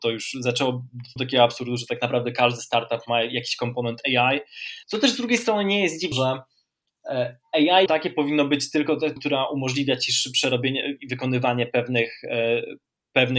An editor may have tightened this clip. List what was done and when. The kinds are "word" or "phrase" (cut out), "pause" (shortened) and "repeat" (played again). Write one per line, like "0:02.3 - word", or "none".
0:01.2 - word
0:04.8 - pause
0:06.1 - word
0:07.9 - word
0:09.2 - word